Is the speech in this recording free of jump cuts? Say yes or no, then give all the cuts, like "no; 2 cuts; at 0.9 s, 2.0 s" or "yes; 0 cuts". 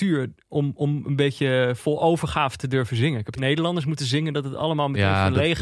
no; 1 cut; at 3.4 s